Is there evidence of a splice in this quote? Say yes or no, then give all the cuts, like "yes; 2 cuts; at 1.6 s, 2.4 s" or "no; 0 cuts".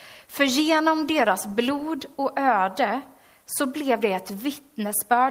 no; 0 cuts